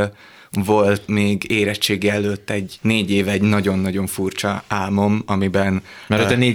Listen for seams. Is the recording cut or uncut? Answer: cut